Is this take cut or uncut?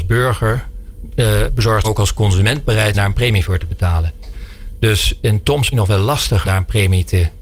cut